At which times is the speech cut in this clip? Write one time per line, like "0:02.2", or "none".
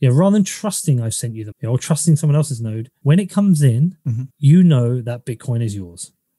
0:01.5
0:04.3